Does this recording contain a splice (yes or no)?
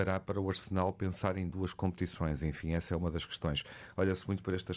no